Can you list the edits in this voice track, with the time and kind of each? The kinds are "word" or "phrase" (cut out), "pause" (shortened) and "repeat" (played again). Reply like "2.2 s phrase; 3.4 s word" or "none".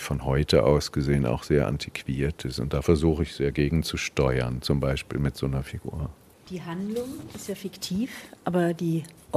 none